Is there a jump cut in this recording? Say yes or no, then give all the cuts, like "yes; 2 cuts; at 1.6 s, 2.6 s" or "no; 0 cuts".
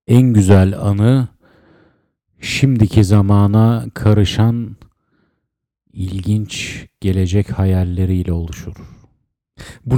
no; 0 cuts